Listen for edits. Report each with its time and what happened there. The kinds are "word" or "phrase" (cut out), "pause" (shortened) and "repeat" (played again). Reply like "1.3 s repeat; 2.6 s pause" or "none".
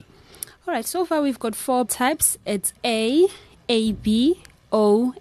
1.9 s word

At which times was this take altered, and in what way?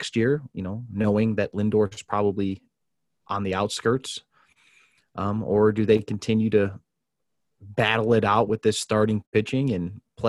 none

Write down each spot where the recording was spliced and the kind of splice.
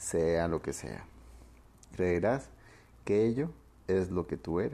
none

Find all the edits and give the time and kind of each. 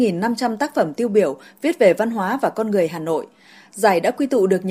none

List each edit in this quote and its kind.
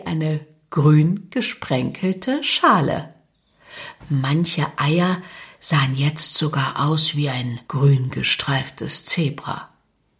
7.6 s pause

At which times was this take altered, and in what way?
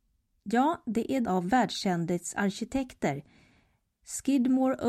1.2 s word

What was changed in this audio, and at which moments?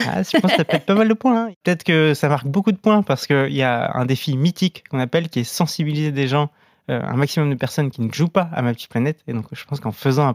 none

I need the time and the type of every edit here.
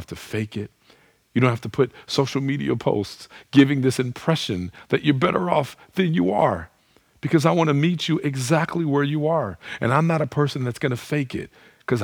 none

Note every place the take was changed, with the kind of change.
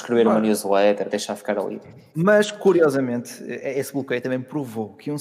none

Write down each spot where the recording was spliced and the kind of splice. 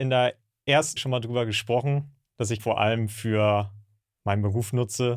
1.0 s word; 2.6 s word

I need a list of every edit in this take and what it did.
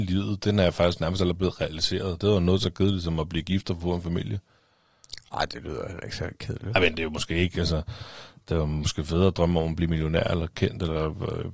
none

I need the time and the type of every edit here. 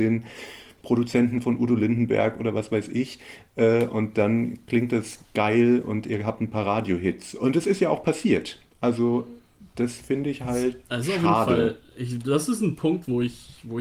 none

